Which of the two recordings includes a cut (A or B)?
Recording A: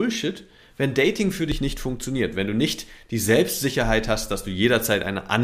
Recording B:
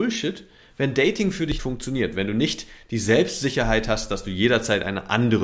B